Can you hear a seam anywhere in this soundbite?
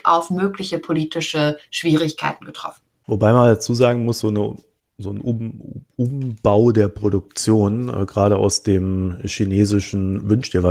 no; 0 cuts

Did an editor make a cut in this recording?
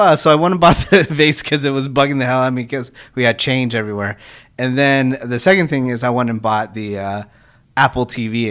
no; 0 cuts

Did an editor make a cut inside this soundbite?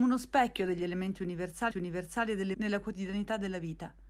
yes; 2 cuts; at 1.7 s, 2.5 s

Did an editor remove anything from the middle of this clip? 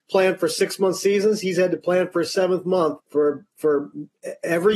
yes; 1 cut; at 3.0 s

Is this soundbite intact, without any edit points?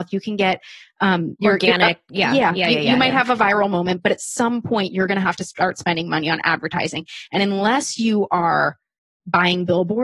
yes; 0 cuts

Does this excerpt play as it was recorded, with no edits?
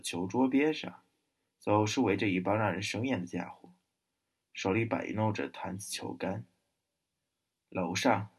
yes; 0 cuts

